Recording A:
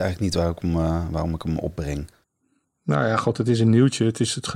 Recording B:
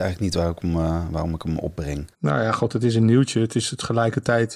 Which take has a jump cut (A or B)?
B